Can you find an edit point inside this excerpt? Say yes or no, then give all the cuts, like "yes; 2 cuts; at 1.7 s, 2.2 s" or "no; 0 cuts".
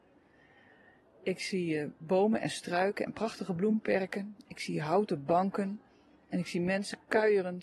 no; 0 cuts